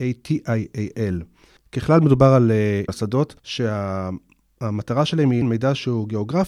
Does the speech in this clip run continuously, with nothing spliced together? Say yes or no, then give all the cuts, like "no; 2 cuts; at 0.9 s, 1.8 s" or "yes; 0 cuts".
no; 3 cuts; at 2.9 s, 3.4 s, 5.4 s